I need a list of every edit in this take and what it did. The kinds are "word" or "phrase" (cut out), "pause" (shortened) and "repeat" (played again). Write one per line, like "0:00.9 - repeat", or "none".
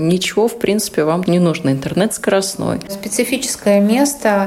0:01.3 - word

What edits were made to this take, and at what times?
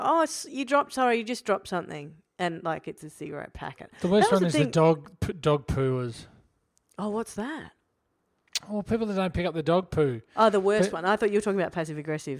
none

